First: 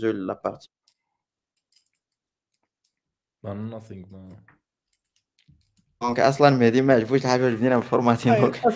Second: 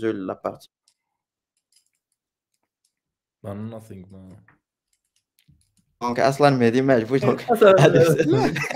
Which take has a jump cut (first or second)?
second